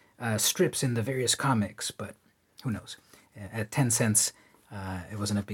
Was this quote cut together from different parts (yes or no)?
no